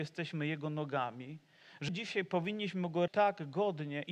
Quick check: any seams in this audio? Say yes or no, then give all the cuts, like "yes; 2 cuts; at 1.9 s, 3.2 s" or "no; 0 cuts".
yes; 2 cuts; at 1.9 s, 3.1 s